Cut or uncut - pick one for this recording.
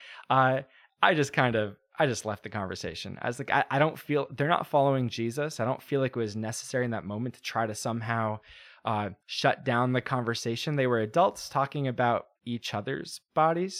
cut